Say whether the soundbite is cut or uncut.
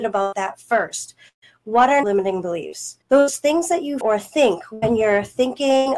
cut